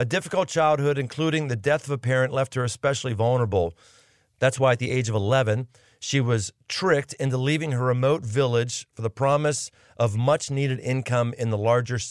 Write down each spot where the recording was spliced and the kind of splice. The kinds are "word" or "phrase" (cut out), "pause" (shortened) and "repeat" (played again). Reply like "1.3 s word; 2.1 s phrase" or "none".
none